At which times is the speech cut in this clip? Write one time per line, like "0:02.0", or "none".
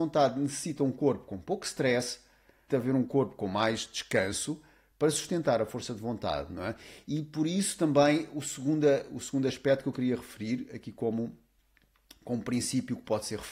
0:02.7

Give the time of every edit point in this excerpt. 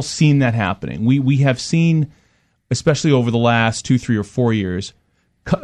none

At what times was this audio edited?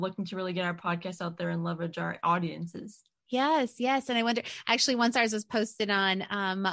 none

